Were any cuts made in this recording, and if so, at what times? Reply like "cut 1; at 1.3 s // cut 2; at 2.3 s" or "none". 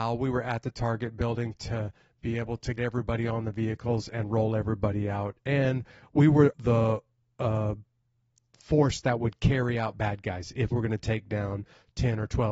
cut 1; at 2.8 s // cut 2; at 6.5 s // cut 3; at 10.7 s